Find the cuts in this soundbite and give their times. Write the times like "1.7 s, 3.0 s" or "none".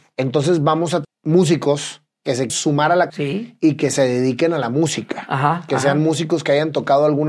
1.0 s, 2.5 s, 3.1 s